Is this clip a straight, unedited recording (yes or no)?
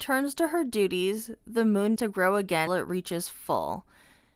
no